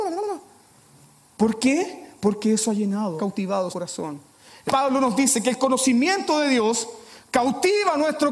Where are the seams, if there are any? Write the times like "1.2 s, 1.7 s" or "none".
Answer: 3.2 s, 3.7 s, 4.7 s